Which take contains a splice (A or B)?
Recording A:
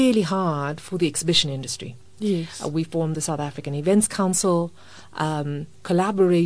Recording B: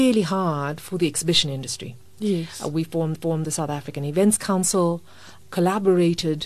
B